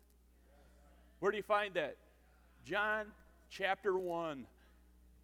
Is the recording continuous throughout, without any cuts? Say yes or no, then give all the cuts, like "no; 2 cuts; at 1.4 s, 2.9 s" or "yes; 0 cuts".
yes; 0 cuts